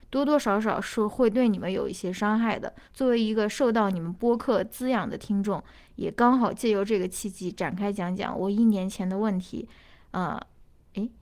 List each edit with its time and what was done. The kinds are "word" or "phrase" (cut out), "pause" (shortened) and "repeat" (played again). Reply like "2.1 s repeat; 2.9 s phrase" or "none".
2.9 s pause